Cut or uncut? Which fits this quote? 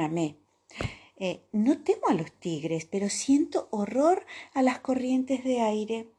uncut